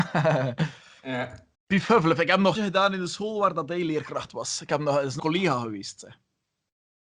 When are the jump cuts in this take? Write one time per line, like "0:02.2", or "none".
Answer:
0:01.5
0:02.6
0:05.2